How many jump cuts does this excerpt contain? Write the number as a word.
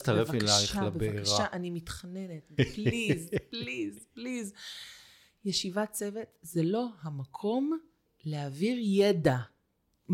zero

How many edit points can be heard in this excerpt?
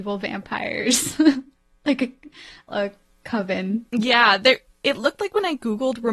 one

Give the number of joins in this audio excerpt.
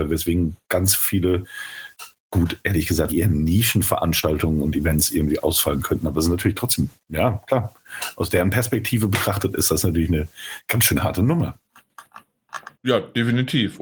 three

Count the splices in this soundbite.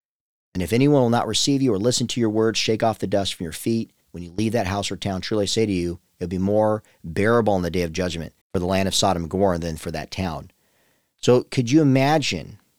two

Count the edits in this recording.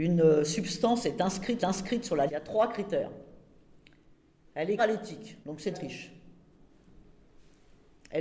five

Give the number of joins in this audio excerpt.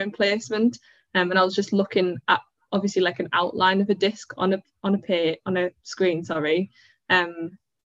zero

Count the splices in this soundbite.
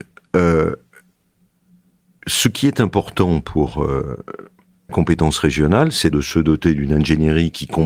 two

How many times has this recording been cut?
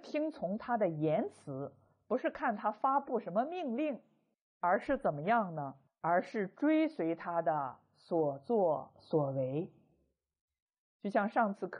two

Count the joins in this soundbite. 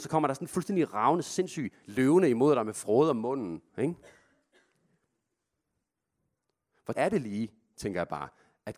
three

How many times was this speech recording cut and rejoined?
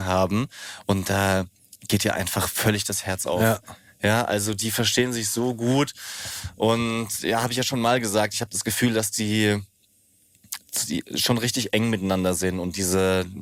zero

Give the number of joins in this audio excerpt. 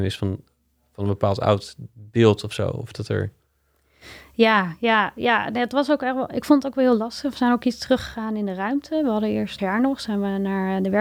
one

